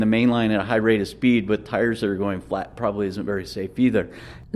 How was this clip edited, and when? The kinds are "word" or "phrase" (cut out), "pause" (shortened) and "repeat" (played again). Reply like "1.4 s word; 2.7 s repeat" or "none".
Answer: none